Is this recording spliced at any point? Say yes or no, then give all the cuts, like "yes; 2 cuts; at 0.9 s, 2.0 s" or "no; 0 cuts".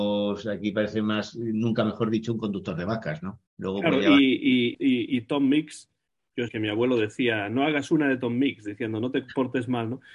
yes; 3 cuts; at 3.5 s, 4.7 s, 6.5 s